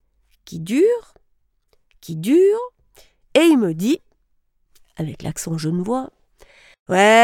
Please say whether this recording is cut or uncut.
uncut